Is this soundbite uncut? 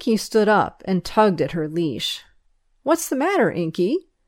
yes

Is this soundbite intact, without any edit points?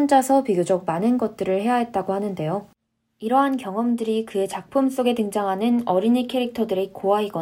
yes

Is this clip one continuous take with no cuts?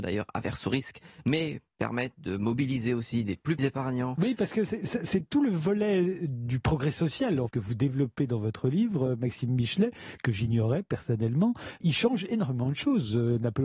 no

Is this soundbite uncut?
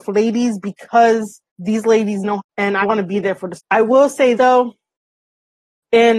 no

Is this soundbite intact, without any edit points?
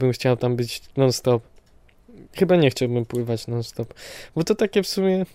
yes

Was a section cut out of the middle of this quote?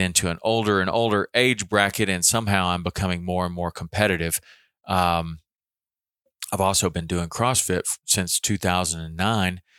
no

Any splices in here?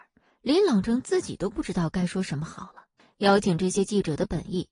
yes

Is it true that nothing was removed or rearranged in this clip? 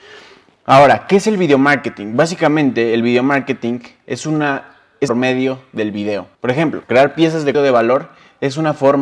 no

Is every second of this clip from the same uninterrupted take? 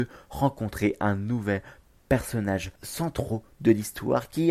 yes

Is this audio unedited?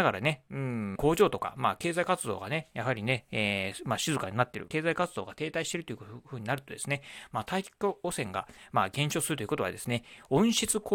no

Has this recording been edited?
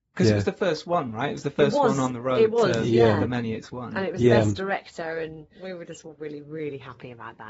no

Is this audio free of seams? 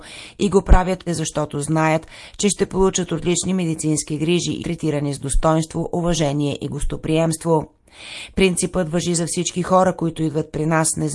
no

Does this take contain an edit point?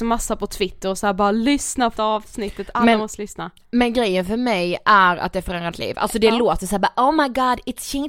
yes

